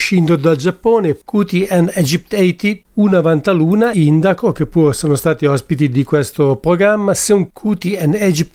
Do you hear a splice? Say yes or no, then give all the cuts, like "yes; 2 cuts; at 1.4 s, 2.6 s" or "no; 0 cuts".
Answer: yes; 2 cuts; at 2.8 s, 3.9 s